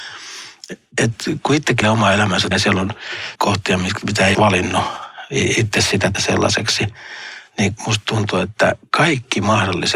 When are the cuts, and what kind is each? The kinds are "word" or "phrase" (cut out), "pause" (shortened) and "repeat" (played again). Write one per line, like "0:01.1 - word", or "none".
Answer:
0:01.8 - word
0:02.5 - word
0:03.3 - word
0:04.3 - word
0:06.1 - word
0:07.8 - word

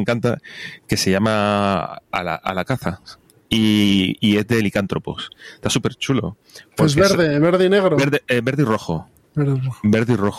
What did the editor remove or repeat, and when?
none

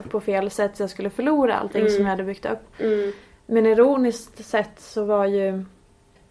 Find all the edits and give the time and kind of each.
none

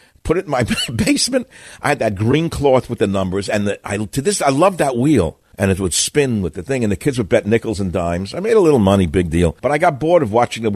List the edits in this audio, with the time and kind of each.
0:05.5 - pause
0:09.6 - pause

